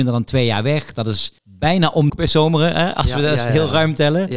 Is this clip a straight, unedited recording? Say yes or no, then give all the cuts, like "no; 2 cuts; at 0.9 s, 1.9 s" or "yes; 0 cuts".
no; 2 cuts; at 1.4 s, 2.1 s